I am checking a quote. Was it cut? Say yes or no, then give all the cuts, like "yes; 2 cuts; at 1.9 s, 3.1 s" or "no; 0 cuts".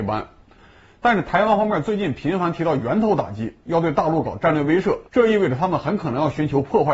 yes; 1 cut; at 5.1 s